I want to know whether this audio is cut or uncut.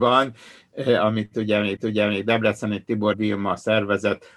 cut